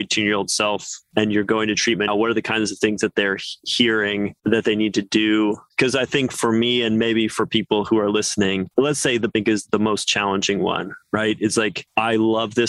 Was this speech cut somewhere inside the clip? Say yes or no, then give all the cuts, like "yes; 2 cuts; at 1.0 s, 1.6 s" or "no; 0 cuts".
yes; 2 cuts; at 2.1 s, 9.3 s